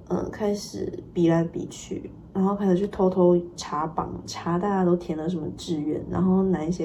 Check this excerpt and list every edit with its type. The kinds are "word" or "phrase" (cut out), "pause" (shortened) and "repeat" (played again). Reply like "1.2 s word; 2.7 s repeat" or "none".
2.3 s pause